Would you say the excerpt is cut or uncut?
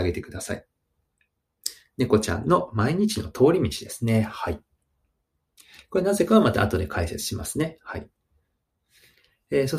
uncut